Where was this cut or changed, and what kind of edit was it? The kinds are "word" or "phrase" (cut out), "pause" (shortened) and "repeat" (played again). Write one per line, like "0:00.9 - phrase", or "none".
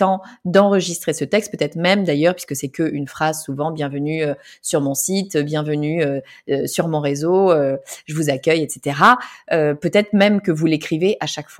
none